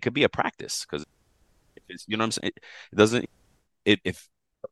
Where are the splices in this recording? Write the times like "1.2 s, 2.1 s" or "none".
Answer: none